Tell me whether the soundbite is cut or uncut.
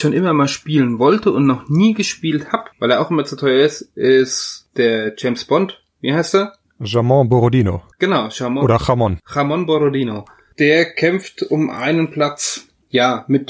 cut